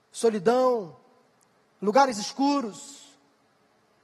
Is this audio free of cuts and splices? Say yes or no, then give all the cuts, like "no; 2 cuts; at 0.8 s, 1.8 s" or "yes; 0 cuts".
yes; 0 cuts